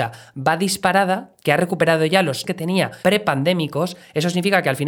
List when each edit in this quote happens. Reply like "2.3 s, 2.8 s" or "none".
2.4 s, 3.0 s

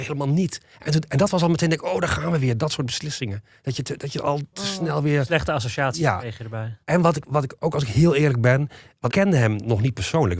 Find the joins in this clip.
6.8 s, 9.1 s

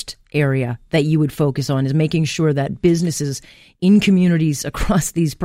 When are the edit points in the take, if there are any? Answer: none

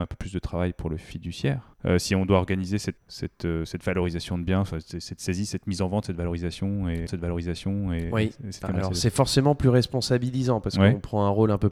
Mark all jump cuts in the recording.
1.7 s, 3.0 s, 3.7 s, 7.1 s

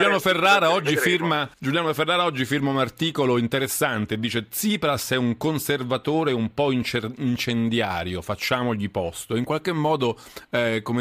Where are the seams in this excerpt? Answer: 1.5 s

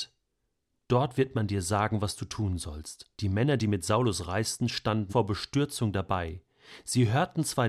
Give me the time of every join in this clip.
3.1 s, 5.1 s

